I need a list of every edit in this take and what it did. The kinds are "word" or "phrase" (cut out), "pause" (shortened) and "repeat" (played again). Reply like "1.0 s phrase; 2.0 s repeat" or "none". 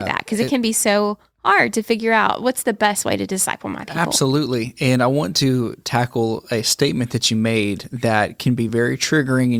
none